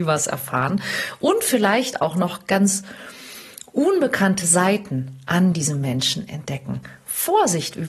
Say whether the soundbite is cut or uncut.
uncut